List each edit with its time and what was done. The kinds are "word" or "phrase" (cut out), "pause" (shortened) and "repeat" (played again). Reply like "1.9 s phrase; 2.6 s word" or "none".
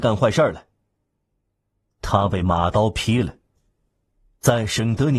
none